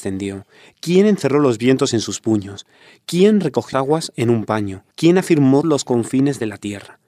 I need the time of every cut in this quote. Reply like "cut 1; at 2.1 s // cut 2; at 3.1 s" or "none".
cut 1; at 3.7 s // cut 2; at 4.9 s // cut 3; at 5.6 s